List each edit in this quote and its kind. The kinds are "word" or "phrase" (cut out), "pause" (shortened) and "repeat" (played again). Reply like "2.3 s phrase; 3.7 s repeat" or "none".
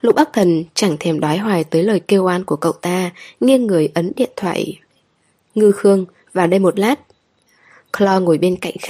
none